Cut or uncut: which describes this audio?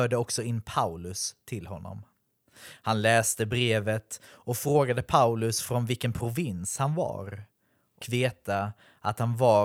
cut